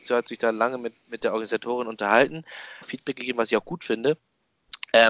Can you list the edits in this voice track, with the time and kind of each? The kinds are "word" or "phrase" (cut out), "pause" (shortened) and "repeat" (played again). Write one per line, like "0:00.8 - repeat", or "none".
0:02.8 - phrase